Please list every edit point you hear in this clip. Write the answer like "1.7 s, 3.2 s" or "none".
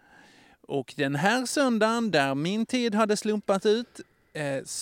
none